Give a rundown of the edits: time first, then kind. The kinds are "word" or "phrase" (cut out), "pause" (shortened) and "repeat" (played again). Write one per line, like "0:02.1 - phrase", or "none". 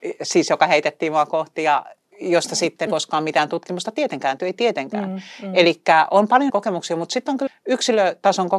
0:02.9 - word
0:04.4 - word
0:06.5 - word
0:07.5 - word